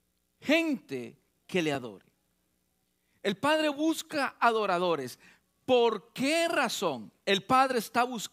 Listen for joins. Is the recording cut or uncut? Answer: uncut